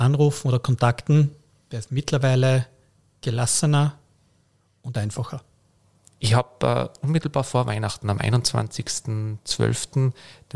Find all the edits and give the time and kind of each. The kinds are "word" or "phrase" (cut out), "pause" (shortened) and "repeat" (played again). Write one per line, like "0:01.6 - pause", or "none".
none